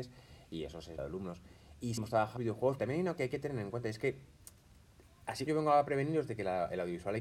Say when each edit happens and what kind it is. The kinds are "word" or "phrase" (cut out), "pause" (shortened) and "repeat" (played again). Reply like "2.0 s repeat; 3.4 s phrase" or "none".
1.0 s word; 2.0 s word; 2.4 s word; 2.8 s word; 3.2 s word; 5.5 s word